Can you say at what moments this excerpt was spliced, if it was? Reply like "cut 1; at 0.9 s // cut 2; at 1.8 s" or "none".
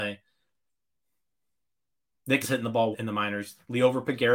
cut 1; at 2.4 s // cut 2; at 2.9 s